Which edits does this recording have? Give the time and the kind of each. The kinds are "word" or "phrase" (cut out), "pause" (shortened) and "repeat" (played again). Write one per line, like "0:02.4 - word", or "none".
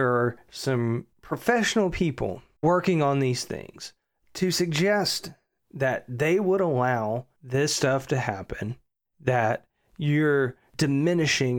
none

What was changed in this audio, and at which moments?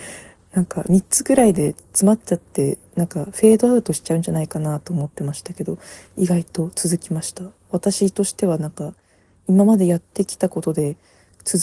none

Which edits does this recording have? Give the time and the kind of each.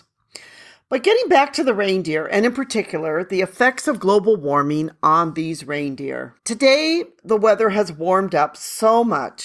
0:06.4 - pause

